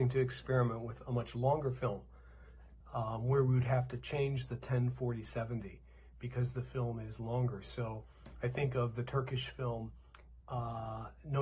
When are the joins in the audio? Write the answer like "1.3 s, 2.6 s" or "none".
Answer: none

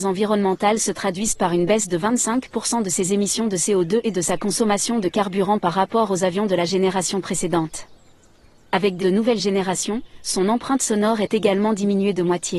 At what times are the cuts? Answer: 9.0 s

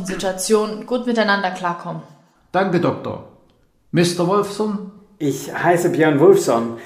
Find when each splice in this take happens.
none

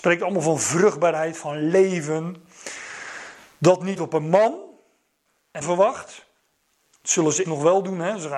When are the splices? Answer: 4.0 s, 5.6 s, 7.5 s

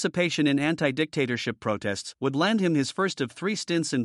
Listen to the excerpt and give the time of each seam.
none

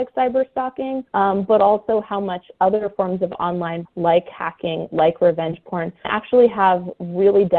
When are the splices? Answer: 1.1 s, 3.9 s, 6.0 s

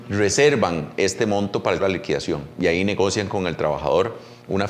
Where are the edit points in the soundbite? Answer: 1.8 s

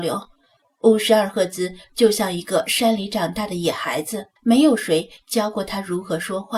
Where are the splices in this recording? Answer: 4.4 s

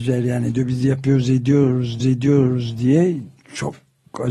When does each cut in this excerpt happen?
2.0 s

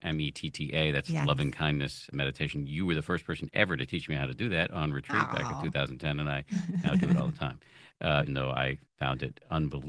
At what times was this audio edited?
2.1 s, 8.3 s, 8.9 s

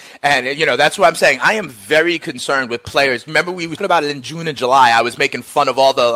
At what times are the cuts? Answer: 3.8 s

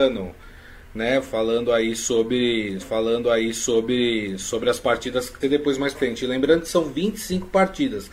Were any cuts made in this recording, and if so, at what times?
2.8 s, 5.4 s, 5.9 s

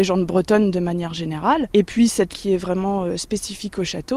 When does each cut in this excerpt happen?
2.3 s

